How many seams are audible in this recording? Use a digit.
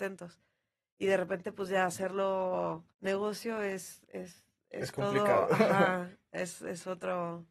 1